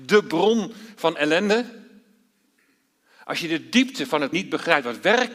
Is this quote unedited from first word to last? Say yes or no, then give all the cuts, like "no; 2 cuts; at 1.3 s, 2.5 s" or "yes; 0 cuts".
no; 2 cuts; at 1.2 s, 4.3 s